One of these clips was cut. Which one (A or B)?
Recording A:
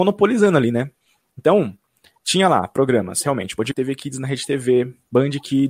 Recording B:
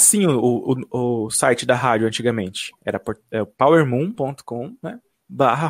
A